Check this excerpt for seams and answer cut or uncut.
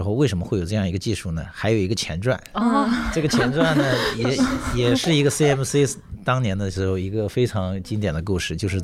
uncut